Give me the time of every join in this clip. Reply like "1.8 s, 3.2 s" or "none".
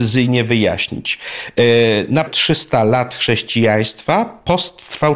2.3 s